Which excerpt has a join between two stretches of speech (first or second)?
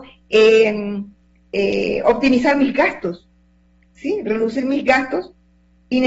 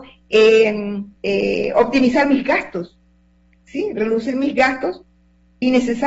second